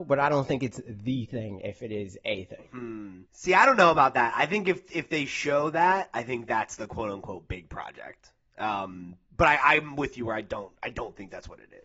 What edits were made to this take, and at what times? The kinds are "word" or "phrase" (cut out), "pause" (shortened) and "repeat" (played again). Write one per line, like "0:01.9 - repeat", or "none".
0:03.3 - pause
0:09.2 - pause